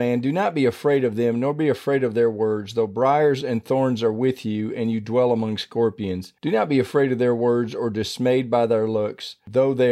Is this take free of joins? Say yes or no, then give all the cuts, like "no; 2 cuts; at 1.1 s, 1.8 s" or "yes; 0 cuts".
no; 1 cut; at 6.4 s